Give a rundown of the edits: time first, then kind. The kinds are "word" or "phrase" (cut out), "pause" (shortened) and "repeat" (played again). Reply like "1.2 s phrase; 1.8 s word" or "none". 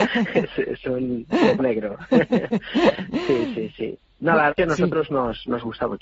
1.6 s word; 4.5 s word